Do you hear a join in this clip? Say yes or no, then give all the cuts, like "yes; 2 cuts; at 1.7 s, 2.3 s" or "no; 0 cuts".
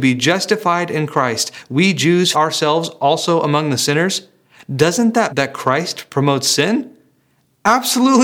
yes; 2 cuts; at 2.3 s, 5.3 s